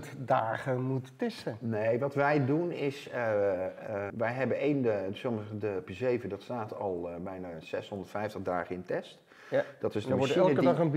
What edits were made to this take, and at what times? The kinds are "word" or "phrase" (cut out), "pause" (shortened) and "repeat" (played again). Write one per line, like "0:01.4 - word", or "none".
0:04.1 - word
0:05.9 - word